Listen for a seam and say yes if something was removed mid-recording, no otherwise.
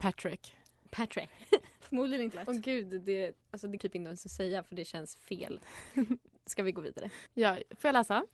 yes